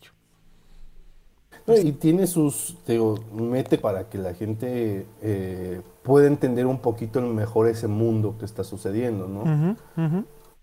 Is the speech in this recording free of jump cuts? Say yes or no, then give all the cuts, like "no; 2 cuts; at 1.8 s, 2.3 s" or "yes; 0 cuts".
no; 4 cuts; at 1.3 s, 1.8 s, 3.8 s, 5.9 s